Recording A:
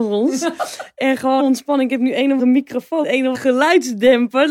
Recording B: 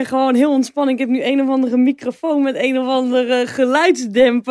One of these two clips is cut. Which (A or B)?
A